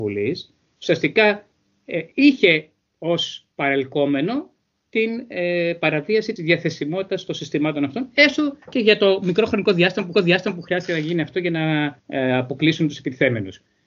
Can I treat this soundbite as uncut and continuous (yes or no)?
no